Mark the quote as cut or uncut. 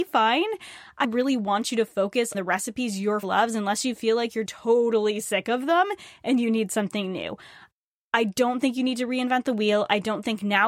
cut